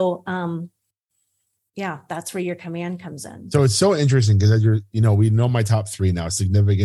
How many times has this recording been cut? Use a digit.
0